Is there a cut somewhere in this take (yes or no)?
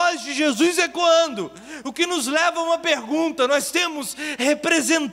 no